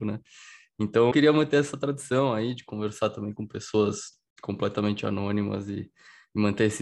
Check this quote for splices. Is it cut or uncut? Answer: cut